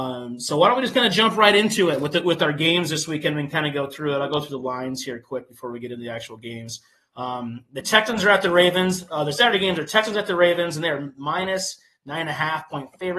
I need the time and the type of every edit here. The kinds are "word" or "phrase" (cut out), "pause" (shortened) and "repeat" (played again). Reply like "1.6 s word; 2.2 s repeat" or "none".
none